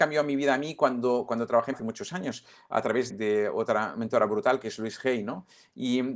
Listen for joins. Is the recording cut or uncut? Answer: cut